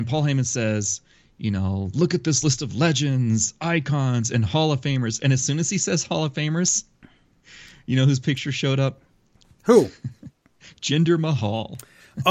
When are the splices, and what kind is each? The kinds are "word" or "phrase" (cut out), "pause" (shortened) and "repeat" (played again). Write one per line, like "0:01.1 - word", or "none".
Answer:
none